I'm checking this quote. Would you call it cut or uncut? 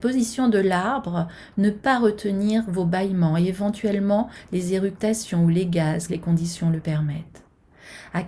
cut